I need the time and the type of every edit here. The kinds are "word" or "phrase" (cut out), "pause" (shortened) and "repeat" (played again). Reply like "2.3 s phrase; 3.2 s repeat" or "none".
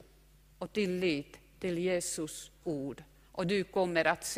2.6 s phrase

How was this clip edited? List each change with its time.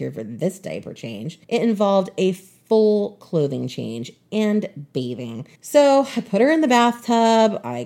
1.4 s pause; 5.6 s pause

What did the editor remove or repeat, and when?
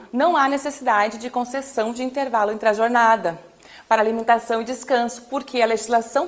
none

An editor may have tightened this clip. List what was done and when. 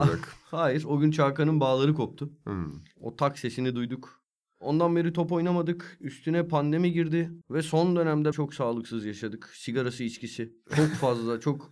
7.4 s pause; 8.3 s word; 10.7 s pause

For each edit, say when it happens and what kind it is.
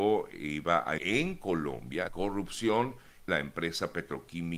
1.0 s word; 2.1 s word; 3.3 s word

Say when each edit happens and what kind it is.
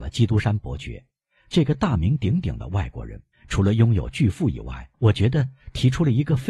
3.3 s pause; 4.9 s pause

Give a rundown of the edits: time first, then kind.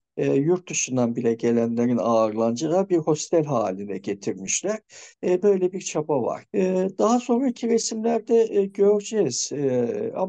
6.5 s pause

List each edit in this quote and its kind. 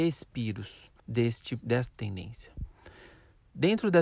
1.0 s pause; 1.9 s phrase

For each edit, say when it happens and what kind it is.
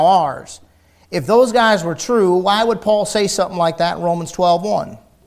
none

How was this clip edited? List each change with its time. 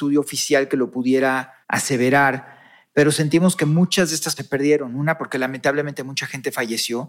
1.6 s pause; 4.4 s word

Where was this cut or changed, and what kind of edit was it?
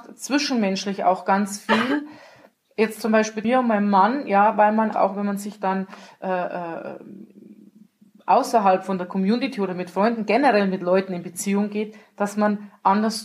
3.4 s word; 4.9 s word

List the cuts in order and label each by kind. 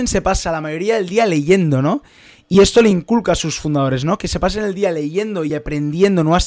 none

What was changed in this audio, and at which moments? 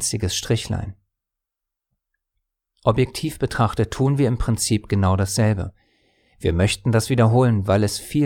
none

